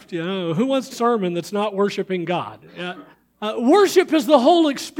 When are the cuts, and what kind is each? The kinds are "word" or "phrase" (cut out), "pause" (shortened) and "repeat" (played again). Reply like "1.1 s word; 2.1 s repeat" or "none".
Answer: 0.9 s phrase; 3.1 s pause